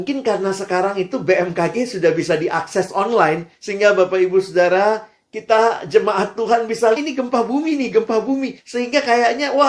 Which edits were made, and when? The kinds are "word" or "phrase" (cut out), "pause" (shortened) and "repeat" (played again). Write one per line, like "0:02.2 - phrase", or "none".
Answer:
0:03.5 - pause
0:07.0 - phrase
0:08.6 - pause